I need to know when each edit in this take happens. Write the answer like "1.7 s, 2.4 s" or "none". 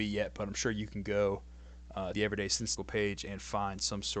2.1 s, 2.8 s